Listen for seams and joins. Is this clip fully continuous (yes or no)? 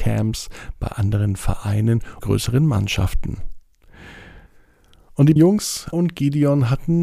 no